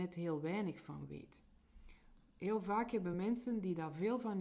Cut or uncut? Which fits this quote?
uncut